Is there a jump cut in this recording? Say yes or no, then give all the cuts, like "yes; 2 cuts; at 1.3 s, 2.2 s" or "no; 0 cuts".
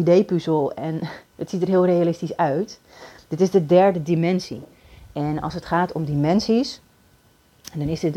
no; 0 cuts